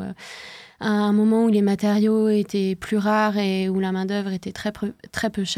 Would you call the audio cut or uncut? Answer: uncut